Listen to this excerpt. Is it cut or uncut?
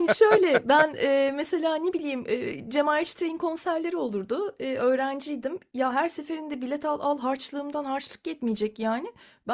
uncut